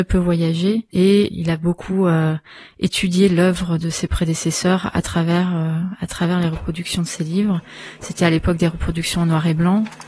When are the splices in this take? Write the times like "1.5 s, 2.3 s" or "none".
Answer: 0.9 s